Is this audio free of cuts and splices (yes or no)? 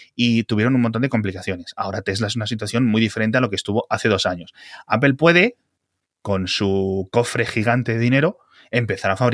yes